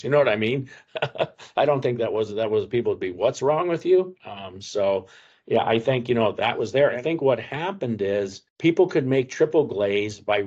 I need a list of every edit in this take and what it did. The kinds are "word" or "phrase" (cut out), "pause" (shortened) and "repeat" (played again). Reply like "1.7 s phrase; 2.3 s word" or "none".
8.5 s pause